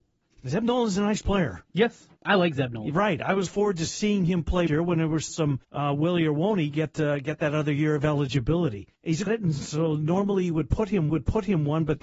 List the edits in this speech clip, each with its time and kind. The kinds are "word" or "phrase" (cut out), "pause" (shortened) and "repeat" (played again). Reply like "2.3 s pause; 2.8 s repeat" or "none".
2.2 s pause; 3.5 s word; 4.7 s phrase; 5.3 s word; 5.6 s pause; 9.0 s pause; 9.3 s phrase; 11.1 s repeat